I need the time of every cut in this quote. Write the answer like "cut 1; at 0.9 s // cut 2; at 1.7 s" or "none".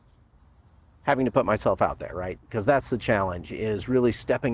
none